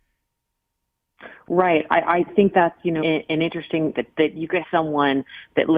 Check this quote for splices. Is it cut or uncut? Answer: cut